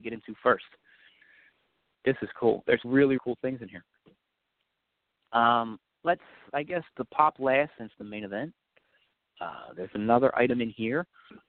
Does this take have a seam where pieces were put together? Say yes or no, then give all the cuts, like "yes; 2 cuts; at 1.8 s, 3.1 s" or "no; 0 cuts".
yes; 4 cuts; at 2.8 s, 3.2 s, 6.9 s, 7.9 s